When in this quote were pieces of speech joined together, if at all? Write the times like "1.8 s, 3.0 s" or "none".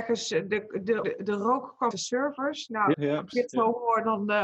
1.0 s, 1.9 s, 2.9 s, 3.3 s